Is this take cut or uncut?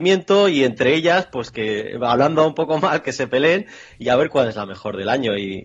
uncut